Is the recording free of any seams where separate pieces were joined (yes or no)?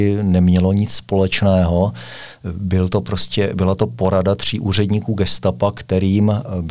yes